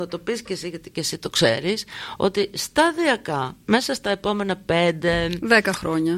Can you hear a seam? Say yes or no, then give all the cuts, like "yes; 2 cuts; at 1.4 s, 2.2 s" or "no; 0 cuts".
no; 0 cuts